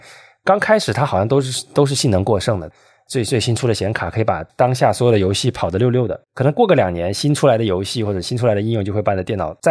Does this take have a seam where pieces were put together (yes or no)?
yes